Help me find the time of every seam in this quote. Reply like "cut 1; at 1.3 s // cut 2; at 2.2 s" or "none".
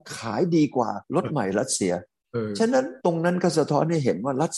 cut 1; at 1.0 s // cut 2; at 3.0 s